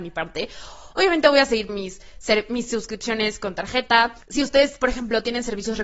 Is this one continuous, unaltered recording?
no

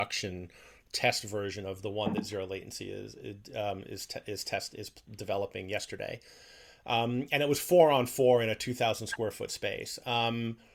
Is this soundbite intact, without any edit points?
yes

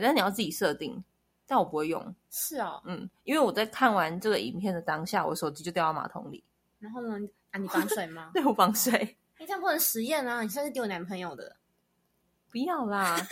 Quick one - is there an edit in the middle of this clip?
no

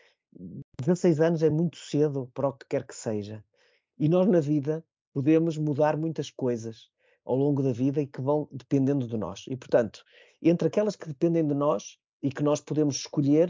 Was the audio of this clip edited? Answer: no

